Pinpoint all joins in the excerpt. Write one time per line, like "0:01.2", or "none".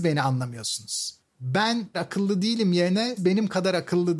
0:01.9
0:03.2